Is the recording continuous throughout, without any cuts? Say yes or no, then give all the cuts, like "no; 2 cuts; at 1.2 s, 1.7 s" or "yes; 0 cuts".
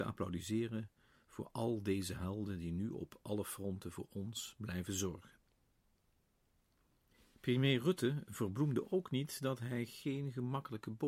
yes; 0 cuts